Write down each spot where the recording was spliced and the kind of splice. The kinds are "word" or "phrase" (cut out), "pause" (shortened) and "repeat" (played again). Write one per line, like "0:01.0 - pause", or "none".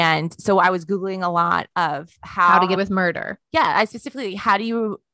0:02.8 - word
0:03.4 - pause